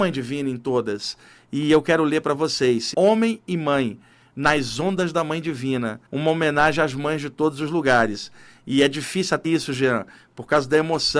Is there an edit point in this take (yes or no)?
yes